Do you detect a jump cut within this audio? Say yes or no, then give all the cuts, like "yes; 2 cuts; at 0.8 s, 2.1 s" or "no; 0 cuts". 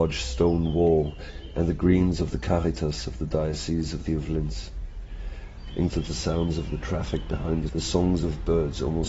yes; 3 cuts; at 4.1 s, 5.9 s, 7.7 s